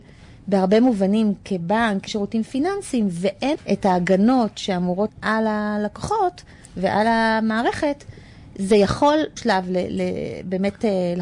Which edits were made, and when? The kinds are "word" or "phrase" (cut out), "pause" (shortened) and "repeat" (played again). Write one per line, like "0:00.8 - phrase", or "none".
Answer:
0:02.1 - word
0:03.6 - word
0:05.1 - word
0:09.4 - word